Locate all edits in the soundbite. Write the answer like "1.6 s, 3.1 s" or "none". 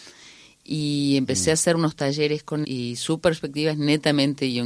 2.6 s